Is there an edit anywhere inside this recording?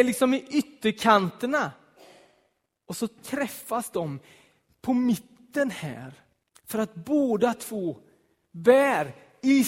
yes; 1 cut; at 6.4 s

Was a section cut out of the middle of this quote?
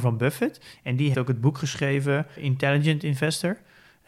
yes; 2 cuts; at 1.1 s, 2.4 s

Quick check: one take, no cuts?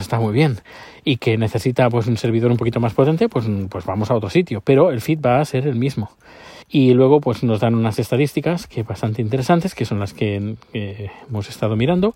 no; 1 cut; at 6.6 s

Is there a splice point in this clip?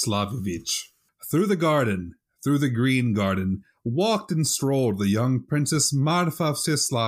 no; 0 cuts

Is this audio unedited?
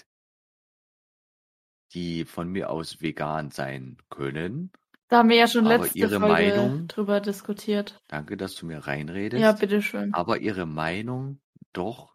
yes; 0 cuts

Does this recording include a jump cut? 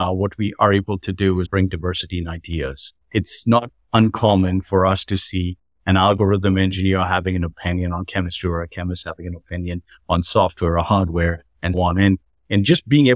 yes; 3 cuts; at 1.5 s, 3.0 s, 11.7 s

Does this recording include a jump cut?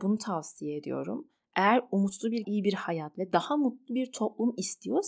yes; 1 cut; at 2.4 s

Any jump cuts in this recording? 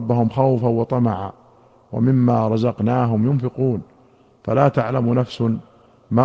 no; 0 cuts

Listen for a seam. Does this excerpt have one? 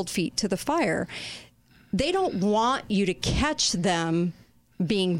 no; 0 cuts

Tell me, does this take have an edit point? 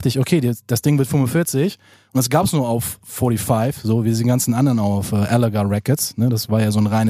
no; 0 cuts

